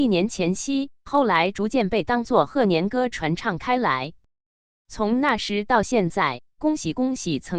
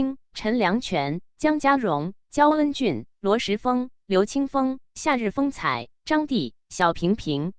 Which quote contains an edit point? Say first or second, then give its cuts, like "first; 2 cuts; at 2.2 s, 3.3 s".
second; 1 cut; at 4.0 s